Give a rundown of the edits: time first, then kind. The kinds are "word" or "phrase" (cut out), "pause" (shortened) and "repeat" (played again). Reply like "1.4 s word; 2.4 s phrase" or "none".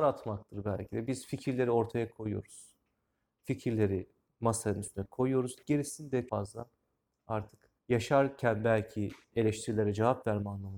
4.3 s pause; 6.3 s word; 7.8 s pause